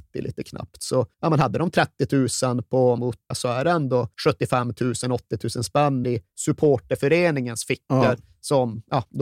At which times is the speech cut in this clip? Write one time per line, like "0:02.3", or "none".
0:01.1
0:03.0
0:03.3
0:04.1
0:06.0